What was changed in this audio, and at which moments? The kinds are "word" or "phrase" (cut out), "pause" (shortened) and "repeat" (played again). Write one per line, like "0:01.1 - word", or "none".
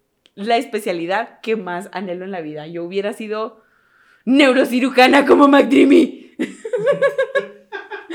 none